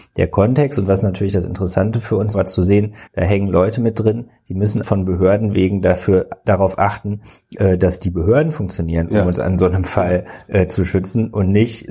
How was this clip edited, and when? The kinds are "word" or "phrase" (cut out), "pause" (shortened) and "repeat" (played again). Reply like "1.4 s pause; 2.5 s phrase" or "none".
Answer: 2.3 s word; 3.1 s word; 4.8 s word